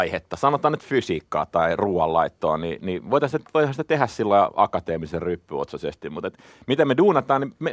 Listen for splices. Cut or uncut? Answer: uncut